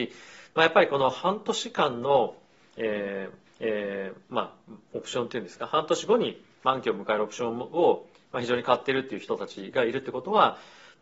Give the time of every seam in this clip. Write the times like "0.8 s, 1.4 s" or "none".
3.5 s